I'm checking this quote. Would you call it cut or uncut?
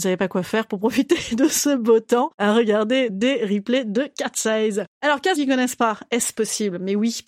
cut